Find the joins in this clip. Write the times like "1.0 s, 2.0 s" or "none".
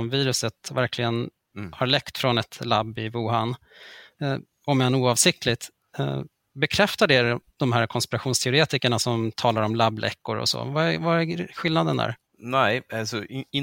none